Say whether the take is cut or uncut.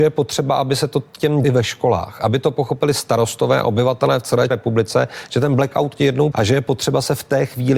cut